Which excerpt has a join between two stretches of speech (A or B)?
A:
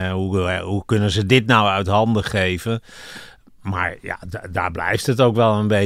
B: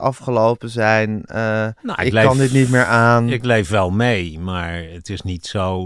B